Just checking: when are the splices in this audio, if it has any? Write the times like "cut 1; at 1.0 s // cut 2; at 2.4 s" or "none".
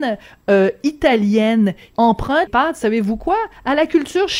cut 1; at 1.9 s // cut 2; at 2.5 s